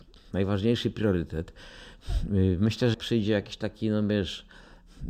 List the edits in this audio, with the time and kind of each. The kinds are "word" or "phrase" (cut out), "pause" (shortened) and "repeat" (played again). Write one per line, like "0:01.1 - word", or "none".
0:02.9 - word